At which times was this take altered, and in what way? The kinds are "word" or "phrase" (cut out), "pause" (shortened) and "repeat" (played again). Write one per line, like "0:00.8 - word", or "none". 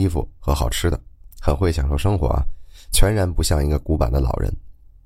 0:01.3 - pause